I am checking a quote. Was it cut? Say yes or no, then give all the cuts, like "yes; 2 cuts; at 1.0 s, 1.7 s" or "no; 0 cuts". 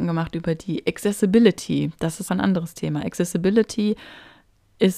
yes; 1 cut; at 2.3 s